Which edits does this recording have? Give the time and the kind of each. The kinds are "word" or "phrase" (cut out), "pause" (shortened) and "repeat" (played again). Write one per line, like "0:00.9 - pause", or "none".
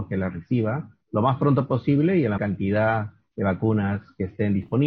0:01.0 - pause
0:02.4 - word